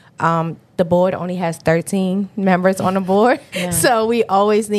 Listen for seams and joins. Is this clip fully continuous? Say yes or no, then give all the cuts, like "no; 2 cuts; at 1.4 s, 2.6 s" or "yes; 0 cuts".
yes; 0 cuts